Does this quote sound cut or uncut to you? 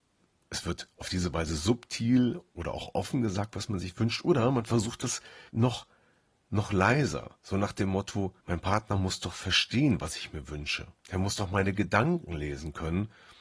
cut